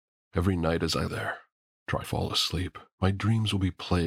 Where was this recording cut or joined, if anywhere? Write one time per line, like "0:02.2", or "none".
0:01.1
0:02.0
0:02.9